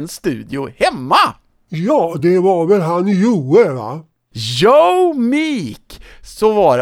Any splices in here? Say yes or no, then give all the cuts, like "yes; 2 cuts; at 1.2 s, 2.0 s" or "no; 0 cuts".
no; 0 cuts